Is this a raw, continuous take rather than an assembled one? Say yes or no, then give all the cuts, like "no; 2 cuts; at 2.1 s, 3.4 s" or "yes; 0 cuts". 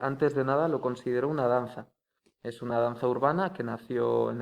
yes; 0 cuts